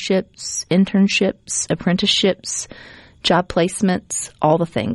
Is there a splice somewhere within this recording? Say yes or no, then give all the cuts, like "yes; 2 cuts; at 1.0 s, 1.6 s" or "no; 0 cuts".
no; 0 cuts